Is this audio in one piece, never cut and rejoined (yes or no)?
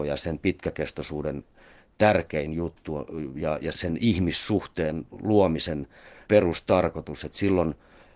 no